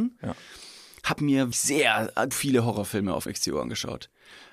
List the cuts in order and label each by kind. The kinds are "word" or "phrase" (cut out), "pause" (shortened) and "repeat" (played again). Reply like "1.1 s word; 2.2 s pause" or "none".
1.2 s word; 1.5 s word; 2.3 s word; 3.3 s word